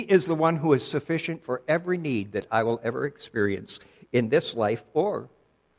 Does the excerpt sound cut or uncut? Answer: uncut